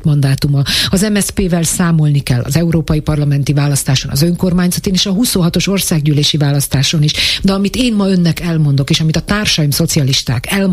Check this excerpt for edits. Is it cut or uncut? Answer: uncut